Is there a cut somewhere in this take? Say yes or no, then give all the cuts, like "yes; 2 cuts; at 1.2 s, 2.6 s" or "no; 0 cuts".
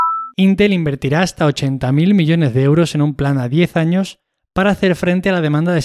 no; 0 cuts